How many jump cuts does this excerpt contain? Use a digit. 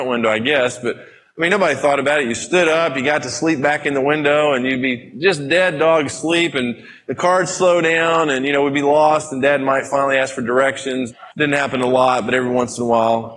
1